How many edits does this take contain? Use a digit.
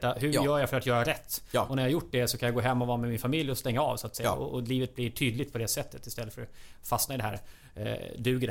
0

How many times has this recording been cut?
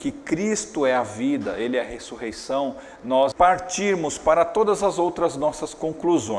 1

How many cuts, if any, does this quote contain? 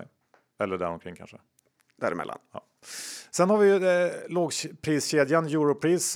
0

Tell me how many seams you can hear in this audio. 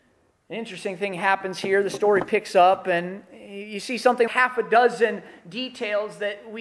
1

